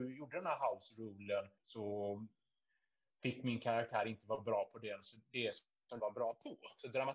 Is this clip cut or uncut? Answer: cut